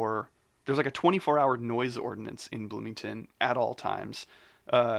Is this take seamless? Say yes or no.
yes